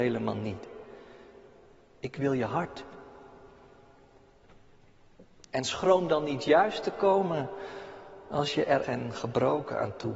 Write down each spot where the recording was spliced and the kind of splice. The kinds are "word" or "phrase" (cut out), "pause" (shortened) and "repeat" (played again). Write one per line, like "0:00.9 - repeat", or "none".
0:08.8 - word